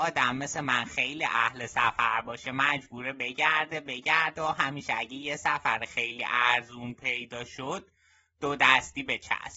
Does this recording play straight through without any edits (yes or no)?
yes